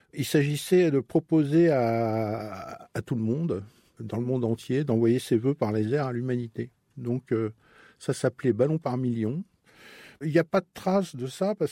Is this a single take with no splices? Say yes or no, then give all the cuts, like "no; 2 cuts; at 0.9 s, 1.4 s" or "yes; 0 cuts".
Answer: yes; 0 cuts